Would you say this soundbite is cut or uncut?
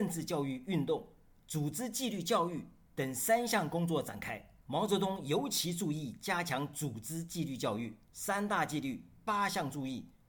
cut